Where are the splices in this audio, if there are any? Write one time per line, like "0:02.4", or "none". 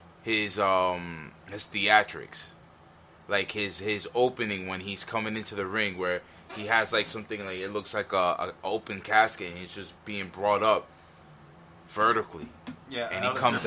none

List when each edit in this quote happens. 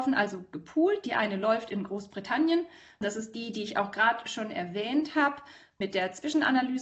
none

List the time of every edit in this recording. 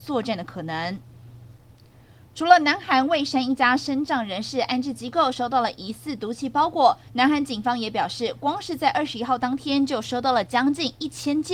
none

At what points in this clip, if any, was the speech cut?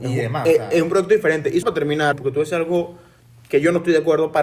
0:01.6
0:02.1

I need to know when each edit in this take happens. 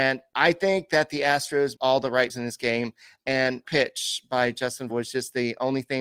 0:01.7
0:02.3
0:03.6
0:04.9

